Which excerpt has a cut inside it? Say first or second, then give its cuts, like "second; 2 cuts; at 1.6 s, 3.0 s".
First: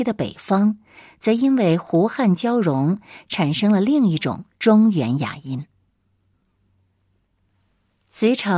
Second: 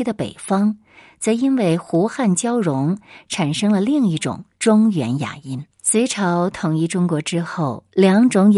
second; 1 cut; at 5.7 s